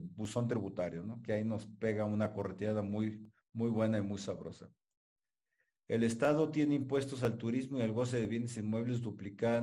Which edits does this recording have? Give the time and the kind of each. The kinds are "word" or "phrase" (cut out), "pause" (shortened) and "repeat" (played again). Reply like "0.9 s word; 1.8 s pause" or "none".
none